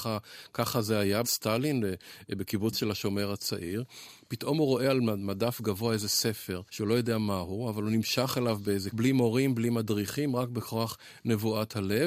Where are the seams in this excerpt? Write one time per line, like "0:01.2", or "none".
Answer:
0:01.2
0:06.7
0:08.9